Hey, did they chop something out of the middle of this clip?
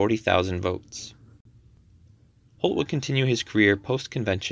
no; 0 cuts

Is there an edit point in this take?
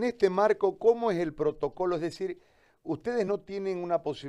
no; 0 cuts

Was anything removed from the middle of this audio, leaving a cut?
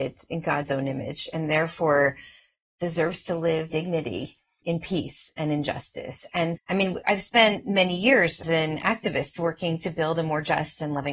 yes; 4 cuts; at 3.7 s, 4.6 s, 6.6 s, 8.4 s

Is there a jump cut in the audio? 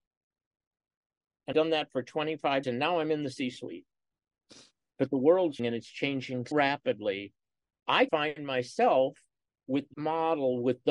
yes; 6 cuts; at 1.5 s, 2.6 s, 5.6 s, 6.5 s, 8.1 s, 9.9 s

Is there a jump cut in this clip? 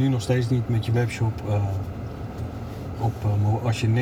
no; 0 cuts

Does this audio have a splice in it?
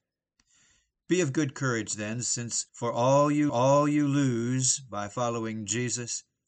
yes; 2 cuts; at 2.7 s, 3.5 s

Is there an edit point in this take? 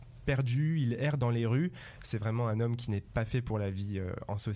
no; 0 cuts

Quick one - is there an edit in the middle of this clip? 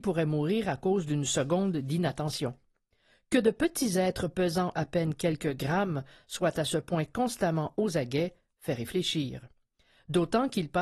no; 0 cuts

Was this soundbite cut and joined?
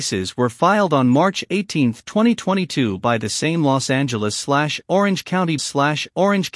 yes; 1 cut; at 5.6 s

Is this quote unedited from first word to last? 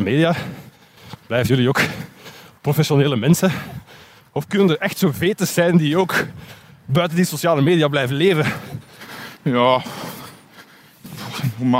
yes; 0 cuts

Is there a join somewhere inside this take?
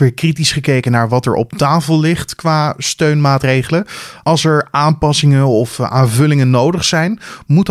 no; 0 cuts

